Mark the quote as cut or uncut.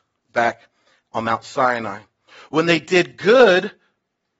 uncut